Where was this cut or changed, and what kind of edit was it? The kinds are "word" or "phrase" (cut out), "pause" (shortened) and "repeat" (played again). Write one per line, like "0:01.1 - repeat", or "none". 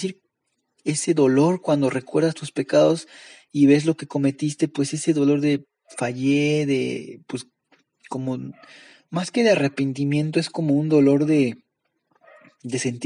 none